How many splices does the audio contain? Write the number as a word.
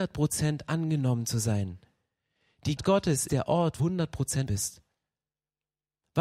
four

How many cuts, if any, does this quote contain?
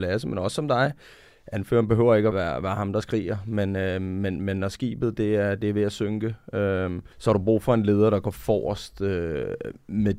two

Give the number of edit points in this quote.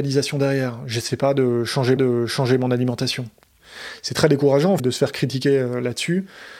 two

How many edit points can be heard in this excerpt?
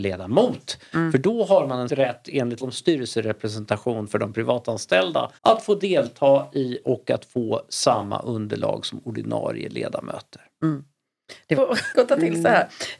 six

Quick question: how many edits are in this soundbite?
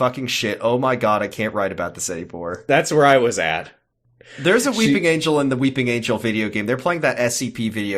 zero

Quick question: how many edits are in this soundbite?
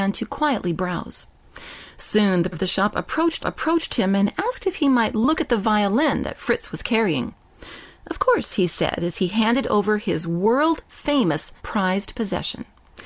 three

